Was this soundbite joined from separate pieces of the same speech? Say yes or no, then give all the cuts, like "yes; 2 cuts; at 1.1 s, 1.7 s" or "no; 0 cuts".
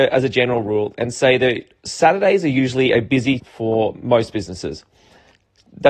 yes; 1 cut; at 3.4 s